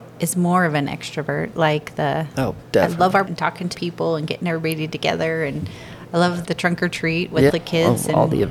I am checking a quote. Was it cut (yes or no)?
yes